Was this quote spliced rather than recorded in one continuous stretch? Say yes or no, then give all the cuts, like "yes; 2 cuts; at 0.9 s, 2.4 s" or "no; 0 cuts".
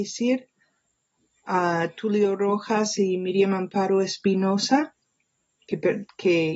no; 0 cuts